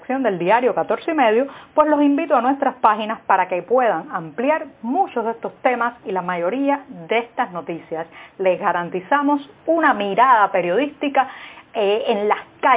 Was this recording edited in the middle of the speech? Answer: no; 0 cuts

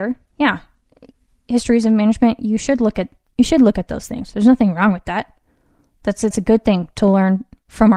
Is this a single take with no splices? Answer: no; 1 cut; at 6.3 s

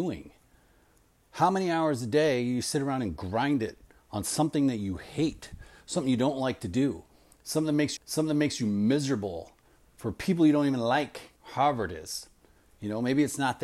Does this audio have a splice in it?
yes; 2 cuts; at 8.0 s, 11.4 s

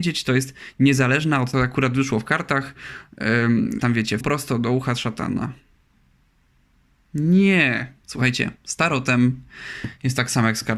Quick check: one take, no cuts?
no; 4 cuts; at 1.5 s, 3.8 s, 4.2 s, 8.0 s

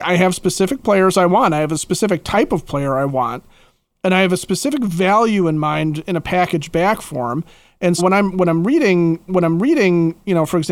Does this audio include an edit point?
yes; 2 cuts; at 8.0 s, 9.3 s

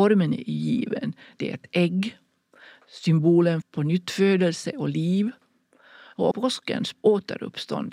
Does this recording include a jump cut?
yes; 3 cuts; at 3.6 s, 6.3 s, 6.9 s

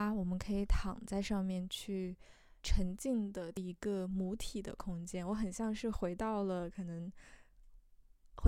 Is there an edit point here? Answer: yes; 1 cut; at 2.6 s

